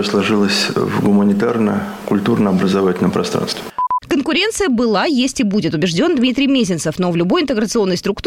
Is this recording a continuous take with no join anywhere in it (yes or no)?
yes